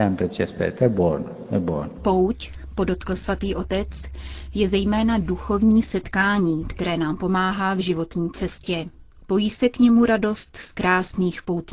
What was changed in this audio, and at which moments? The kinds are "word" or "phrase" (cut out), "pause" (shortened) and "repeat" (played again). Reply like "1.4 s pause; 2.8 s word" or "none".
none

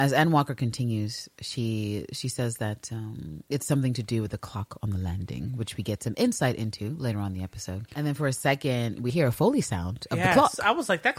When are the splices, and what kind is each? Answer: 7.9 s pause; 9.1 s word

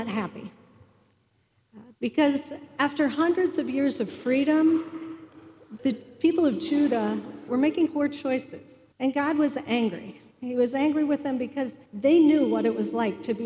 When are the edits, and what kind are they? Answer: 5.8 s word; 7.5 s word; 7.9 s word; 8.9 s pause; 10.3 s pause; 11.9 s pause

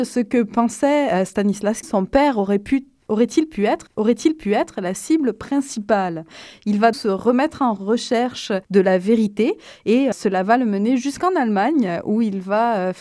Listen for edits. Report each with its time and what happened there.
1.8 s word; 3.9 s repeat; 6.9 s word; 8.6 s pause; 10.1 s word

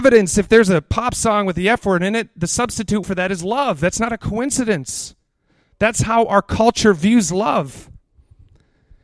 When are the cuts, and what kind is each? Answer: 3.0 s word

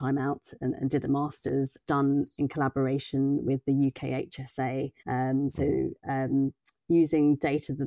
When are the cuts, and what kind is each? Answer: 1.9 s phrase; 5.0 s pause

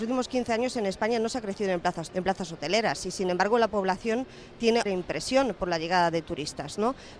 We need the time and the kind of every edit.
2.1 s word; 4.9 s word

